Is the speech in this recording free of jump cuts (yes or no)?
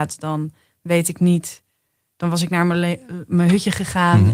yes